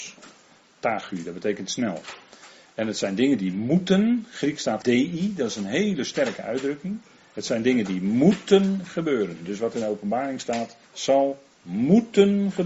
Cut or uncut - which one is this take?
cut